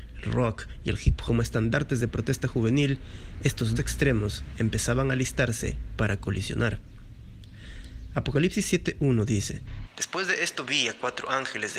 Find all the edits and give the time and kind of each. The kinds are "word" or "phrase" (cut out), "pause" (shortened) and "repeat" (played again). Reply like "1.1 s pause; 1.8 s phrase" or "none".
1.3 s word; 3.8 s word